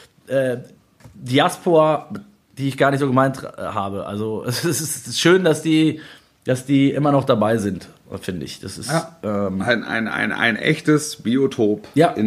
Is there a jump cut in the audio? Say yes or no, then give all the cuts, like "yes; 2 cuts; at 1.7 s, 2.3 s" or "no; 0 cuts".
no; 0 cuts